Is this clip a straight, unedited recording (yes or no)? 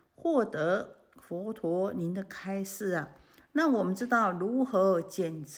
yes